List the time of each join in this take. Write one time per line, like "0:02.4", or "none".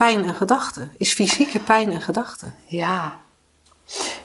none